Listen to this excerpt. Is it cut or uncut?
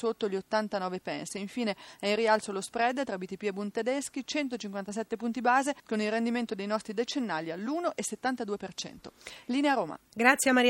cut